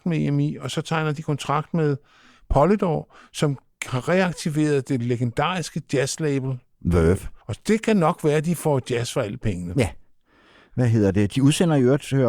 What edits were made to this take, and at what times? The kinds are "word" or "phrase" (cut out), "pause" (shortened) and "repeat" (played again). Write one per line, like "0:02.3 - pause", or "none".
0:07.4 - pause